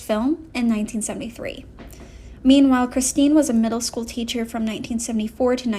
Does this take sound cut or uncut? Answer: uncut